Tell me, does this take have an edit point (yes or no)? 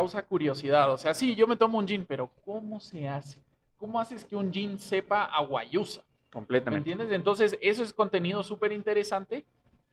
no